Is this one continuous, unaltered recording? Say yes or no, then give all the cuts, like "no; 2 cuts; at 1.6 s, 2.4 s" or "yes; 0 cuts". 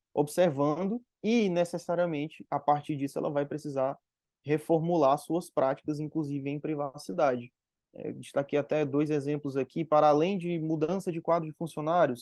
yes; 0 cuts